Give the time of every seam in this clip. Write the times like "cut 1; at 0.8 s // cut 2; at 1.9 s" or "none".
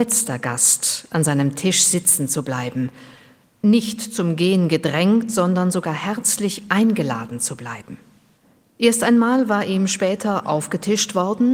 none

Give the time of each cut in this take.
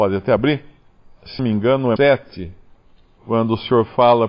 cut 1; at 1.4 s // cut 2; at 2.0 s

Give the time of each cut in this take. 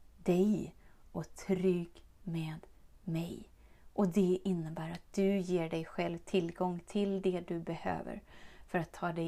none

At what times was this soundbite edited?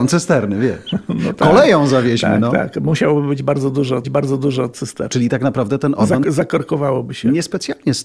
cut 1; at 4.0 s // cut 2; at 6.2 s

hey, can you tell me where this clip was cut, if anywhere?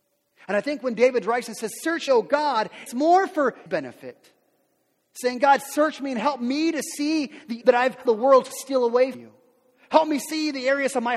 cut 1; at 2.1 s // cut 2; at 2.9 s // cut 3; at 3.7 s // cut 4; at 7.6 s // cut 5; at 8.0 s // cut 6; at 9.1 s

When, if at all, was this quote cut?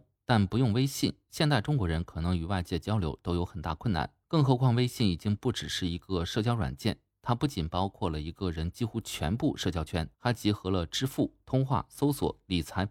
cut 1; at 4.2 s // cut 2; at 10.1 s

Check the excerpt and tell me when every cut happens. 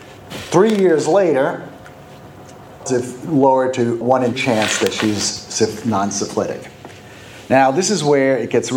cut 1; at 2.9 s // cut 2; at 4.0 s // cut 3; at 4.3 s

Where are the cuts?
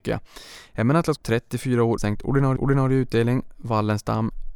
cut 1; at 1.2 s // cut 2; at 2.0 s // cut 3; at 2.6 s

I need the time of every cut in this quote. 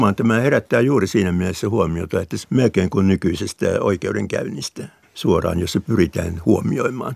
cut 1; at 2.4 s // cut 2; at 5.0 s

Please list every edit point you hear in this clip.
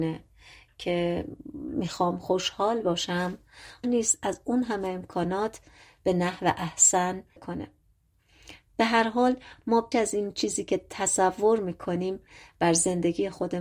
cut 1; at 3.8 s // cut 2; at 7.4 s // cut 3; at 9.9 s

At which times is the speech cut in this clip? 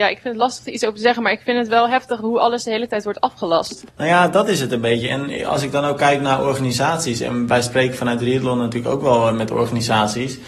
cut 1; at 3.9 s

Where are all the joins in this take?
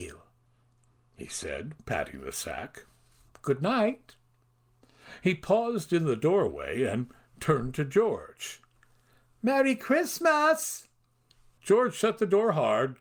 none

